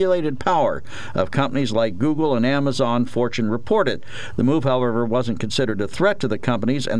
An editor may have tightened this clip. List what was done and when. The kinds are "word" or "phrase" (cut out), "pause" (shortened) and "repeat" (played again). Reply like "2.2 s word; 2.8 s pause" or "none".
none